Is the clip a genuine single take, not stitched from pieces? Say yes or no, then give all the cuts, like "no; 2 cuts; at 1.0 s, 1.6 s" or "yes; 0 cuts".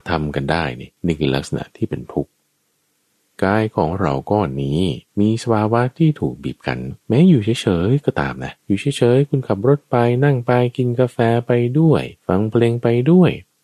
no; 5 cuts; at 1.0 s, 5.1 s, 7.0 s, 8.6 s, 12.2 s